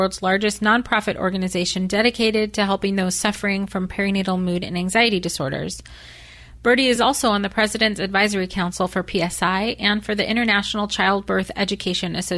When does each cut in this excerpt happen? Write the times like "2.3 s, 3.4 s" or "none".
none